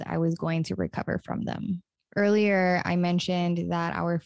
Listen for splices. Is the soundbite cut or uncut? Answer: uncut